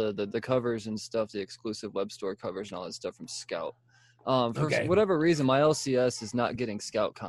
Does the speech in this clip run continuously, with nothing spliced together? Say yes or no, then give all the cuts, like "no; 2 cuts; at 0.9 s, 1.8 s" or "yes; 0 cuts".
yes; 0 cuts